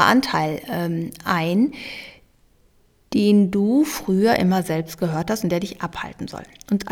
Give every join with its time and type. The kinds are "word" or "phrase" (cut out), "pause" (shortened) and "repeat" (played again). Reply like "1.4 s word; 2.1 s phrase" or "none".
none